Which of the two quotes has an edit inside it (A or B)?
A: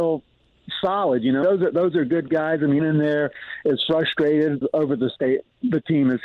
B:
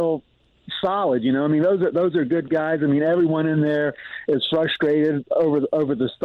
A